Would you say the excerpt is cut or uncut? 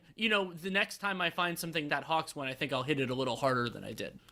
cut